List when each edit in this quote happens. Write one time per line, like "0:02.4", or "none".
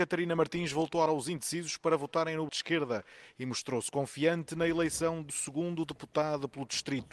0:01.1
0:02.5
0:05.3